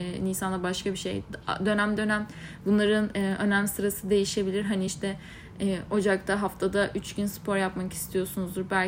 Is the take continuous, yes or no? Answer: yes